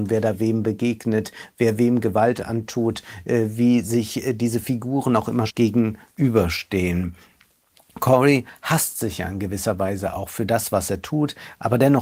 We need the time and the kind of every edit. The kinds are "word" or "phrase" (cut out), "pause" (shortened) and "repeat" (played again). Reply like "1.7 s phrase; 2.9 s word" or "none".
5.5 s word